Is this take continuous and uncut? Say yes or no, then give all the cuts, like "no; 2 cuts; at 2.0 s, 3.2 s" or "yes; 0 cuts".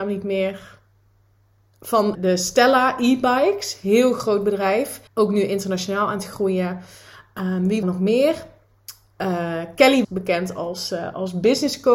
no; 4 cuts; at 2.1 s, 5.1 s, 7.8 s, 10.0 s